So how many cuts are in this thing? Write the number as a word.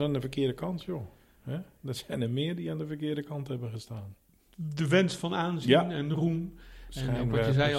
zero